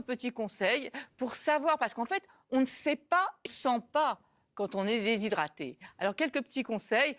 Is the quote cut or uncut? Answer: cut